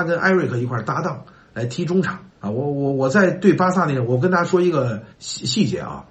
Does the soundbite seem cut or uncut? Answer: cut